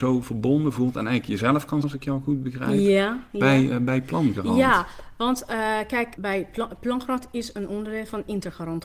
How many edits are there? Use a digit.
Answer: 2